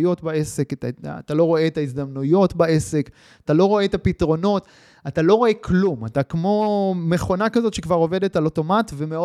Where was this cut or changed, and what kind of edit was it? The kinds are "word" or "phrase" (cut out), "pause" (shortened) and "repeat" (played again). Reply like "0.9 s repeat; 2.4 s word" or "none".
none